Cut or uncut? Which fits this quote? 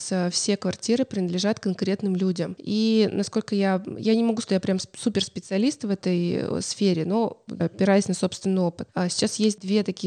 cut